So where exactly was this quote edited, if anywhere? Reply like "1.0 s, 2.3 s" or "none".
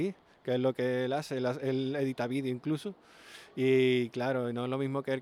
none